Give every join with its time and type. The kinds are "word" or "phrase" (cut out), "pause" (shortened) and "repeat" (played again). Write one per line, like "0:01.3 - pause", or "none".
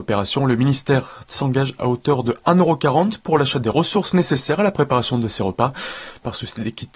none